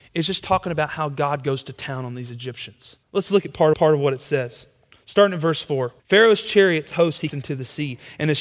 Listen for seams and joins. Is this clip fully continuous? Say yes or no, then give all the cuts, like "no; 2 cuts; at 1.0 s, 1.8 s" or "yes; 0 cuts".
no; 6 cuts; at 3.0 s, 3.7 s, 4.9 s, 6.0 s, 6.9 s, 7.3 s